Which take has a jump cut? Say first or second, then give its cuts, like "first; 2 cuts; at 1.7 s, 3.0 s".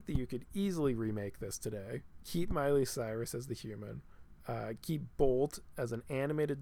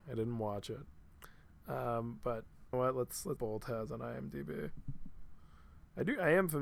second; 2 cuts; at 2.7 s, 3.4 s